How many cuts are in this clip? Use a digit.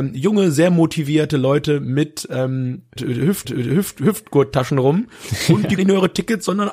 3